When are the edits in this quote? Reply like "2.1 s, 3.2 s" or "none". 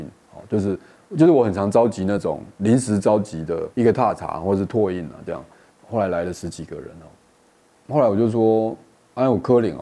3.7 s